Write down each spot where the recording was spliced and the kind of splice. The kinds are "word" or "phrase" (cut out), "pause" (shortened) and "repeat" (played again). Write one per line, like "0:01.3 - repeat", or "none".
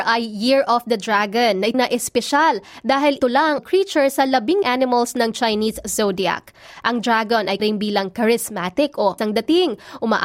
0:01.7 - word
0:03.2 - word
0:03.6 - phrase
0:04.6 - word
0:07.6 - word
0:09.2 - word